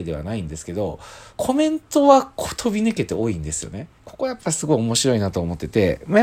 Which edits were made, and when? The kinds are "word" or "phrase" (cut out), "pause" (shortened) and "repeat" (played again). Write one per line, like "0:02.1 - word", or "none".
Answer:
0:01.3 - pause
0:04.0 - pause